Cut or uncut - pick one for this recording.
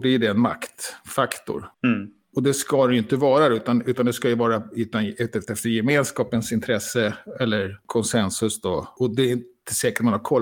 cut